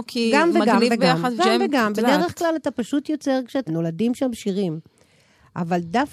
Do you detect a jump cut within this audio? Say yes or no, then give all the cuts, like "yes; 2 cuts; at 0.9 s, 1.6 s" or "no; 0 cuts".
yes; 2 cuts; at 1.4 s, 3.7 s